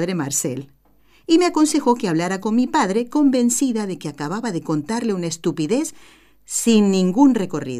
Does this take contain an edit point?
no; 0 cuts

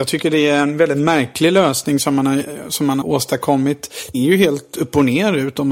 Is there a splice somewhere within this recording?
yes; 2 cuts; at 3.0 s, 4.1 s

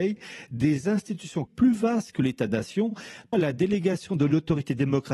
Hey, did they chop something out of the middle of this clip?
yes; 2 cuts; at 1.5 s, 3.3 s

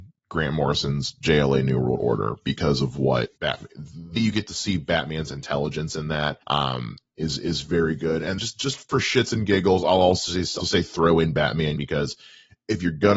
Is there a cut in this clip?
yes; 7 cuts; at 3.4 s, 4.2 s, 6.4 s, 8.4 s, 8.9 s, 10.6 s, 11.8 s

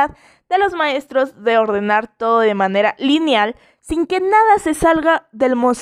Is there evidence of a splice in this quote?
no; 0 cuts

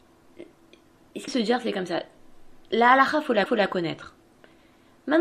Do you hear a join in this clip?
yes; 2 cuts; at 1.3 s, 3.5 s

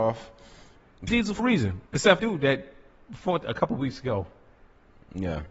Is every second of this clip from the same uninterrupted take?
no; 5 cuts; at 1.1 s, 1.4 s, 1.9 s, 2.2 s, 3.4 s

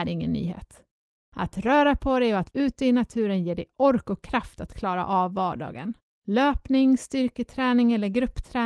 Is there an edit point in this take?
yes; 2 cuts; at 2.5 s, 6.0 s

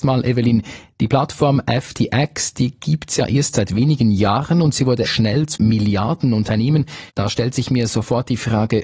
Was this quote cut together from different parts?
yes; 3 cuts; at 5.1 s, 5.6 s, 7.1 s

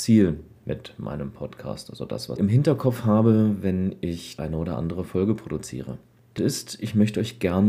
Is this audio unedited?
no; 3 cuts; at 2.4 s, 4.4 s, 6.4 s

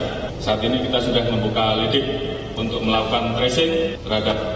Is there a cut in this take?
no; 0 cuts

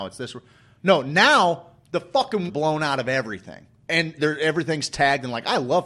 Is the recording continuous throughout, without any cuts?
no; 2 cuts; at 2.5 s, 4.2 s

